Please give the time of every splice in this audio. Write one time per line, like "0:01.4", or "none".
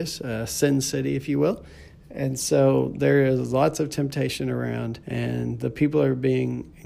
0:05.0